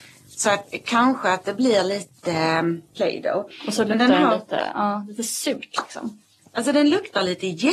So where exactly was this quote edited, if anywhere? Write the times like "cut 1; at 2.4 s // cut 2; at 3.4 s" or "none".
none